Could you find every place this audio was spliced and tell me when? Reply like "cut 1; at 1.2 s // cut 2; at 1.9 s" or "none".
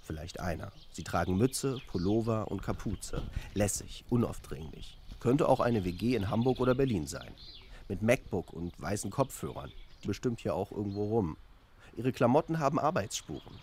cut 1; at 10.1 s